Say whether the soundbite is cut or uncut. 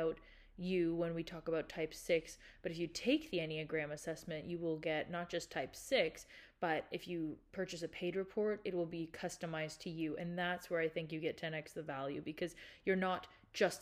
uncut